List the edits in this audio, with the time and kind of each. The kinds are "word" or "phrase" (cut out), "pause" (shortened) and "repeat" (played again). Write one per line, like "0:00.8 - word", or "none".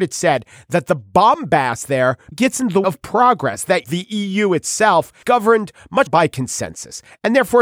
0:02.3 - word
0:02.8 - word
0:03.8 - word
0:05.2 - word
0:06.1 - word